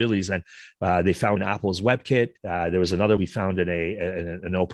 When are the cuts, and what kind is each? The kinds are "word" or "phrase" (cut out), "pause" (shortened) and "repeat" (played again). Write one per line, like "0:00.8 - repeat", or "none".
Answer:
0:01.4 - word
0:02.4 - pause
0:03.2 - word